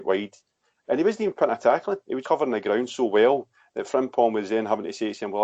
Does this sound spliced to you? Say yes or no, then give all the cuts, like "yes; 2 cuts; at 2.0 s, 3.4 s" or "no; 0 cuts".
yes; 1 cut; at 2.2 s